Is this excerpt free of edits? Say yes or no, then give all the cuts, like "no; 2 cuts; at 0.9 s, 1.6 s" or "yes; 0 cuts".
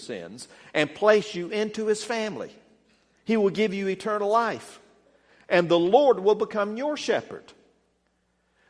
yes; 0 cuts